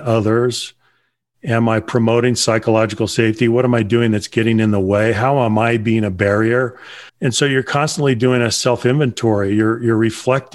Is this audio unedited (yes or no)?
no